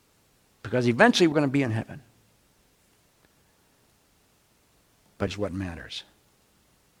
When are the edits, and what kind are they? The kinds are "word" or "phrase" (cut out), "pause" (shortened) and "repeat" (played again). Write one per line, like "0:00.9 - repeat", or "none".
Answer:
0:01.3 - word
0:05.3 - word